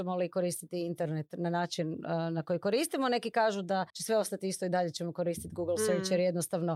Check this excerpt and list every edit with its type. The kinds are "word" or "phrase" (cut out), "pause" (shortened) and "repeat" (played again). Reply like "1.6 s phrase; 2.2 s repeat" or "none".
3.9 s pause

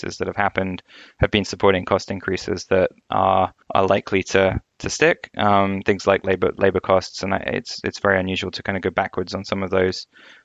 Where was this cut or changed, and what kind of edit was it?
3.6 s pause

